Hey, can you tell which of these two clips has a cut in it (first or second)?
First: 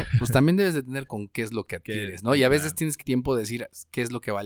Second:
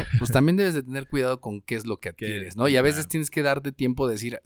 first